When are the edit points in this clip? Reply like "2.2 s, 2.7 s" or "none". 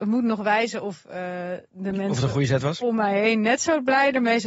none